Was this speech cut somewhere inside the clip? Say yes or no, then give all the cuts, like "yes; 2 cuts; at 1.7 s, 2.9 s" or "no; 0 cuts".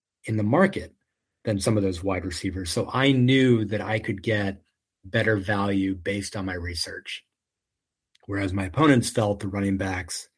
no; 0 cuts